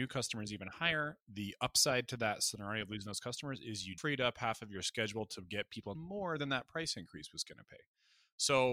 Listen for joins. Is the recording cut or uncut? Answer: cut